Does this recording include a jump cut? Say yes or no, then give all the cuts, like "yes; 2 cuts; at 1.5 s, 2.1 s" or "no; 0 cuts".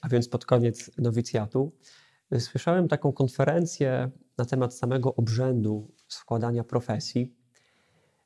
no; 0 cuts